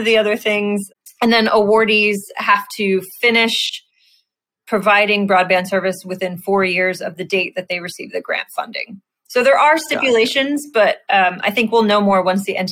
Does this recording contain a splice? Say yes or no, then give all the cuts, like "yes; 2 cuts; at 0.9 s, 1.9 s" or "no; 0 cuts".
no; 0 cuts